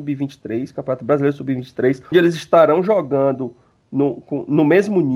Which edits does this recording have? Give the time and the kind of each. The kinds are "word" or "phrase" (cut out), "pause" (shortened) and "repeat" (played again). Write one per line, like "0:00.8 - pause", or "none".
0:02.1 - word